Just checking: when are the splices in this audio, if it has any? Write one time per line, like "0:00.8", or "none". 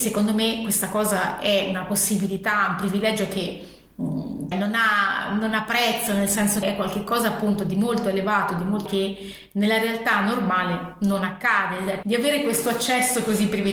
0:04.5
0:06.6
0:08.9
0:12.0